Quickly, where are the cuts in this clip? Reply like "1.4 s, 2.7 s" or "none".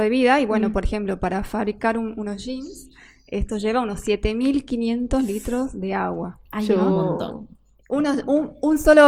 none